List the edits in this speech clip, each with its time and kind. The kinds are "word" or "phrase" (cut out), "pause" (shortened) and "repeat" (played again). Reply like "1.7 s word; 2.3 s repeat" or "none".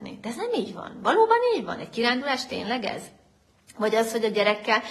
none